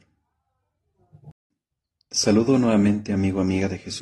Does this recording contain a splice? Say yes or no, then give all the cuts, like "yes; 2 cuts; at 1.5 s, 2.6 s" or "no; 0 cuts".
no; 0 cuts